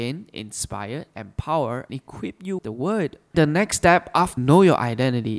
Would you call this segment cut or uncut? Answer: cut